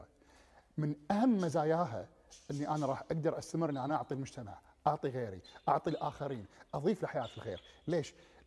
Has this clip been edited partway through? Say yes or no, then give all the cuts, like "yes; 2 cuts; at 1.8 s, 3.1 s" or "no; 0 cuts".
no; 0 cuts